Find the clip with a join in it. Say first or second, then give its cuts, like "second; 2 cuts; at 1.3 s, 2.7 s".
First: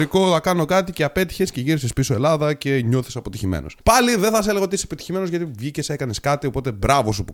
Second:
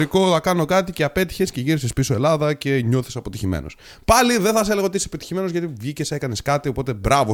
first; 1 cut; at 3.8 s